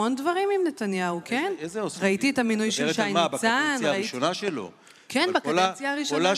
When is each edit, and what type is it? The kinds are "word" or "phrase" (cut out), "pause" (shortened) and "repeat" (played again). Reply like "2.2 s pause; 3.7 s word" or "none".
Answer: none